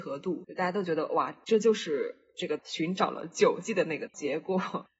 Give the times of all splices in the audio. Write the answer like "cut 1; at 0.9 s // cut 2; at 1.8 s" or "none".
cut 1; at 2.6 s // cut 2; at 4.1 s